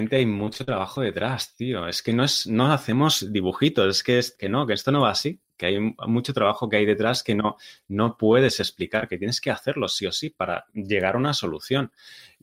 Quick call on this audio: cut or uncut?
cut